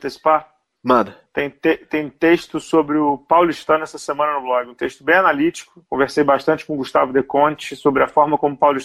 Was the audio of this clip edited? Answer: yes; 1 cut; at 1.3 s

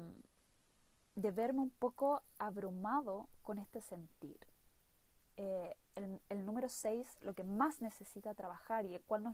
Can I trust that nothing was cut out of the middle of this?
yes; 0 cuts

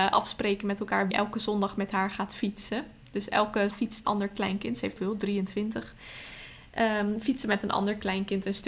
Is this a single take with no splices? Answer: no; 4 cuts; at 1.1 s, 3.7 s, 4.0 s, 5.0 s

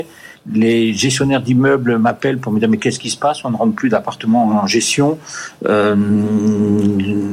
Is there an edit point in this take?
no; 0 cuts

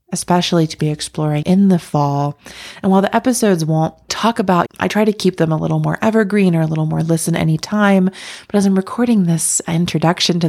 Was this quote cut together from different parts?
yes; 3 cuts; at 1.4 s, 4.1 s, 4.7 s

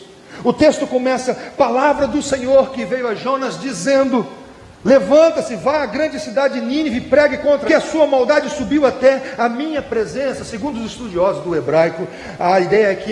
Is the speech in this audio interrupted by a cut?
yes; 1 cut; at 7.7 s

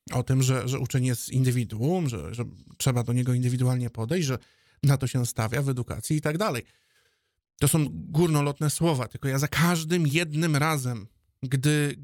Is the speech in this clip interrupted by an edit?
no; 0 cuts

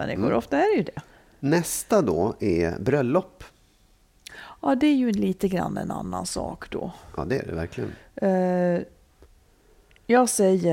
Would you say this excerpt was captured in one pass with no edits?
yes; 0 cuts

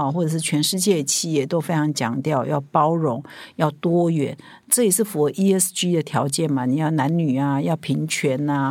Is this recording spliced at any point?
no; 0 cuts

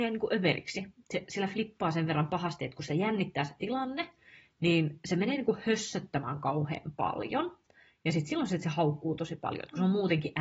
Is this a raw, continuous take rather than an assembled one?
yes; 0 cuts

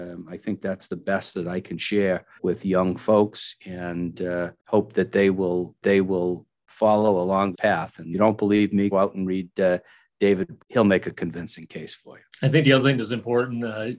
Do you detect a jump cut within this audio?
yes; 8 cuts; at 2.4 s, 4.6 s, 5.8 s, 7.5 s, 8.1 s, 8.9 s, 10.6 s, 12.3 s

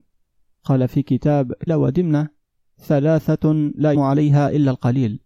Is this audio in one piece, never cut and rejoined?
no; 2 cuts; at 1.7 s, 3.9 s

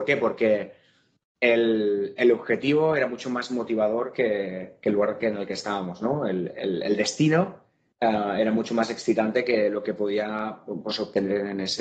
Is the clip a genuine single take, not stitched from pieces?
yes; 0 cuts

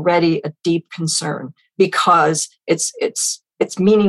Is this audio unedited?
yes; 0 cuts

